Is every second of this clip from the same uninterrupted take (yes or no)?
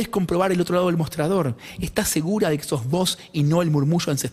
yes